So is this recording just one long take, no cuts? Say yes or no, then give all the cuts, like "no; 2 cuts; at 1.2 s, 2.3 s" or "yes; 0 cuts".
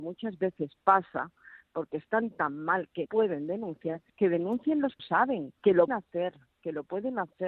no; 5 cuts; at 3.1 s, 4.1 s, 5.0 s, 5.6 s, 5.9 s